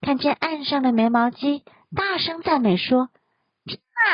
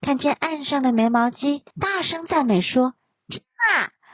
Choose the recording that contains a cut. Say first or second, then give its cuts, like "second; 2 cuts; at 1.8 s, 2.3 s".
second; 2 cuts; at 1.7 s, 3.0 s